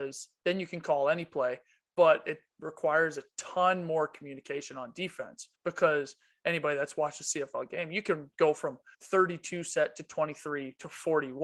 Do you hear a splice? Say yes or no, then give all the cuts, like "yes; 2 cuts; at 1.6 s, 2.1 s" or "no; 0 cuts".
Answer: yes; 2 cuts; at 5.6 s, 8.9 s